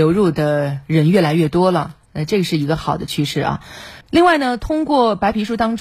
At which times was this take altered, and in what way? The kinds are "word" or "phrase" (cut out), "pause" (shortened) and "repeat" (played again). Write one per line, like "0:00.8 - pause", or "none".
0:04.0 - pause